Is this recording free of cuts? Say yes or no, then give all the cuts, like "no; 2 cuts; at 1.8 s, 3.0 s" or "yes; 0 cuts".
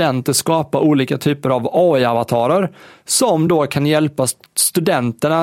yes; 0 cuts